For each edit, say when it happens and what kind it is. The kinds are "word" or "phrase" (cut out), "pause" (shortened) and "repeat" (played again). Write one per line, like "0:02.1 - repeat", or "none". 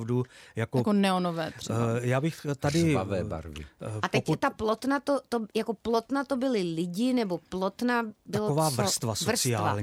none